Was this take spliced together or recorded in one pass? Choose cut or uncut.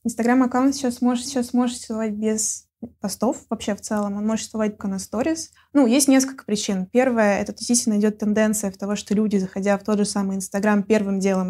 cut